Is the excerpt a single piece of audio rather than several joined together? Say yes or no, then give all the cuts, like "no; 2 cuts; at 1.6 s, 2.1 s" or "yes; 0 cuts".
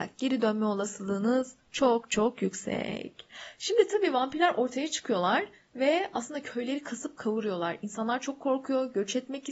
yes; 0 cuts